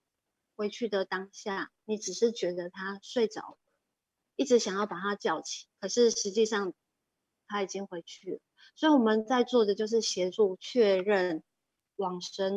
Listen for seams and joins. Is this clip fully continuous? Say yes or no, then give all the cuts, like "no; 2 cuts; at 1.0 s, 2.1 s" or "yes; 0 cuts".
no; 1 cut; at 5.7 s